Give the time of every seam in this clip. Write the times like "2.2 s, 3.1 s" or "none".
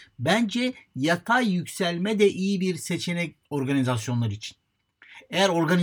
3.4 s